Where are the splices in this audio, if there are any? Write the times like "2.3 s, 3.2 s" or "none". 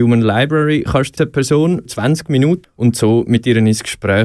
1.2 s, 1.9 s, 2.6 s